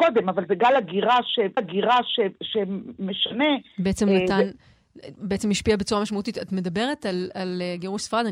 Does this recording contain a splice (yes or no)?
yes